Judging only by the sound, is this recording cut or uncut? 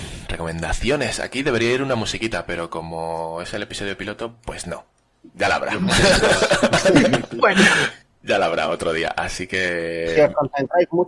uncut